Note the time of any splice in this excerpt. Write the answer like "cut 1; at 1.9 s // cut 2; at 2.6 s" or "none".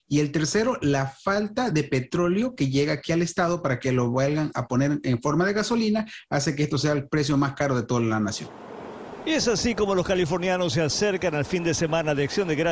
none